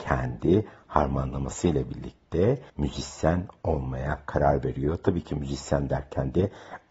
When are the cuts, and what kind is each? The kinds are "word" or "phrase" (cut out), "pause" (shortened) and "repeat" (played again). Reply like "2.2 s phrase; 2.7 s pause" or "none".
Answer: 2.7 s pause